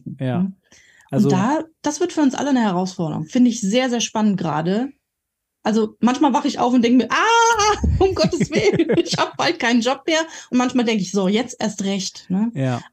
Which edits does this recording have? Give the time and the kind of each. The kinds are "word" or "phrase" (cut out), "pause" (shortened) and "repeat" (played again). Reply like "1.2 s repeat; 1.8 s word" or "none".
none